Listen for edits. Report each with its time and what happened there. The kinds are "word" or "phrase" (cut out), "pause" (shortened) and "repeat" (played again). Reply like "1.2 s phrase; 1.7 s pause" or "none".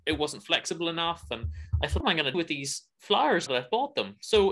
2.0 s word; 2.3 s word; 3.5 s word